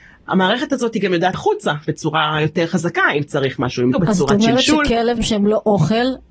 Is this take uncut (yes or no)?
no